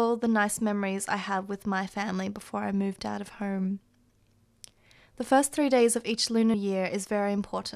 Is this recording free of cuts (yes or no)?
no